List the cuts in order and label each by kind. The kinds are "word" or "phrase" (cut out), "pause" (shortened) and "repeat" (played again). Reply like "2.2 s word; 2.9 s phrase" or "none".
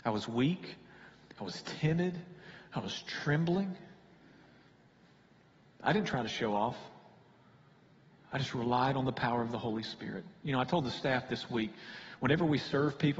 none